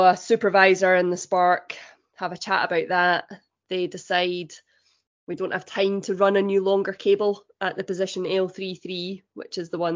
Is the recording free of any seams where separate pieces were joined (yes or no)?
yes